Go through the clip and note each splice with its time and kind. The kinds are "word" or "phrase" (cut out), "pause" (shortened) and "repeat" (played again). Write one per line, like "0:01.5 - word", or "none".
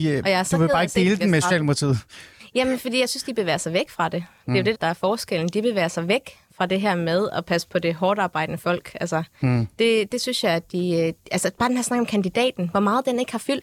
0:04.7 - word